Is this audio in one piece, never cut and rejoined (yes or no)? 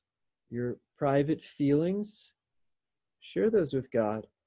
yes